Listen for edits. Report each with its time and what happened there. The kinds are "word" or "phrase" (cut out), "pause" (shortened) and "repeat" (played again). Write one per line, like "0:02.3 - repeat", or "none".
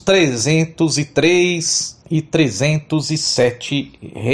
none